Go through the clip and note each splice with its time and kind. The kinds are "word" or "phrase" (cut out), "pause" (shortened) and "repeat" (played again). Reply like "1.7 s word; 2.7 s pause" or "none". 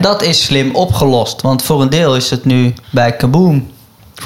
2.8 s pause